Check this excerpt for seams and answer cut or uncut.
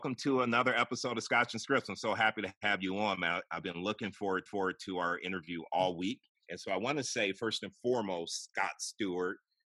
cut